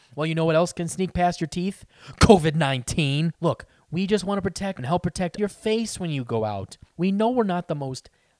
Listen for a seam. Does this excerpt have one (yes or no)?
yes